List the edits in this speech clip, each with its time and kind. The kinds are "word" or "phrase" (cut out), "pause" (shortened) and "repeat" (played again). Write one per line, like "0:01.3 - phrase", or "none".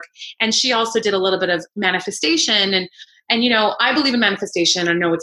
none